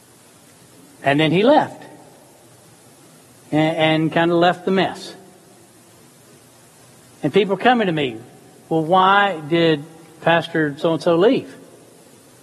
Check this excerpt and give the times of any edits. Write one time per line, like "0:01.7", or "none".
none